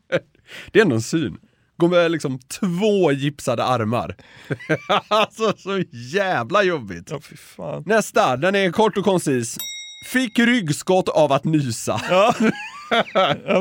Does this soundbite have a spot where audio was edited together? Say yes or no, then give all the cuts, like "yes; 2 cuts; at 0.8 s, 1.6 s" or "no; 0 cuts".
no; 0 cuts